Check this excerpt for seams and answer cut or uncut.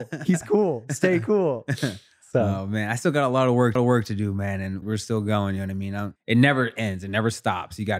cut